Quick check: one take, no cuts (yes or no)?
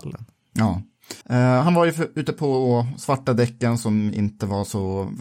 no